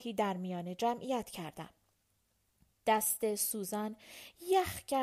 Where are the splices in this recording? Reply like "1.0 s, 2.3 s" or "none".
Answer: none